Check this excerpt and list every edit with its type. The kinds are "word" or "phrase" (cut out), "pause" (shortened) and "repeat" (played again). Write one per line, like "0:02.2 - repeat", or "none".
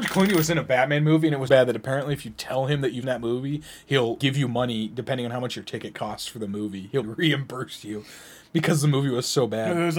0:01.5 - word
0:03.0 - word
0:04.2 - word
0:07.0 - word